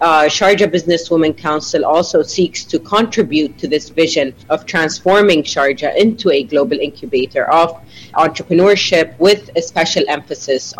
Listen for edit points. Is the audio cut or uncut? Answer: cut